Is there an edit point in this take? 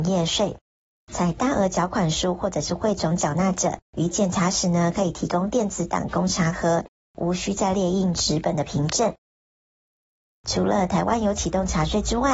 yes; 1 cut; at 3.8 s

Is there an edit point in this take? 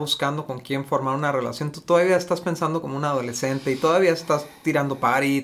no; 0 cuts

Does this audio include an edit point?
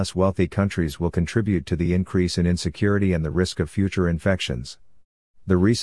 no; 0 cuts

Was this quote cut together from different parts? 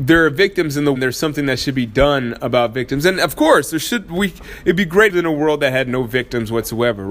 yes; 2 cuts; at 0.9 s, 5.1 s

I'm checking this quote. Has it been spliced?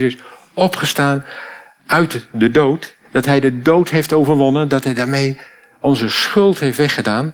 no; 0 cuts

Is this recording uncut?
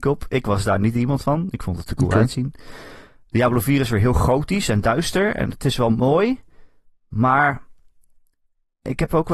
yes; 0 cuts

